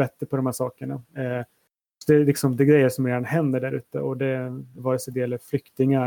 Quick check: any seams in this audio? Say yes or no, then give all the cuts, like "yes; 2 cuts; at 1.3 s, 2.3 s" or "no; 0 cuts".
yes; 1 cut; at 4.8 s